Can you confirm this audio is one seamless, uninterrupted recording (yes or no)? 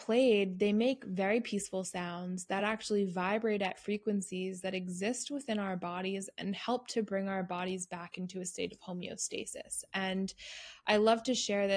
yes